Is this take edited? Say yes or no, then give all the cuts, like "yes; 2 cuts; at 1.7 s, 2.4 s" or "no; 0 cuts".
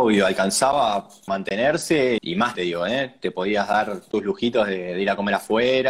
yes; 4 cuts; at 1.3 s, 2.2 s, 2.5 s, 4.1 s